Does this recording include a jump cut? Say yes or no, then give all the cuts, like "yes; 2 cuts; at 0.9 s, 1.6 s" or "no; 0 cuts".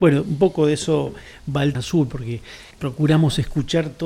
yes; 2 cuts; at 1.7 s, 2.7 s